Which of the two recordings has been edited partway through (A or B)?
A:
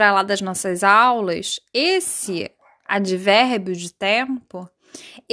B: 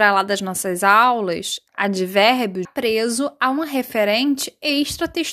B